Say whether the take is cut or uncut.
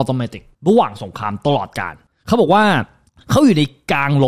uncut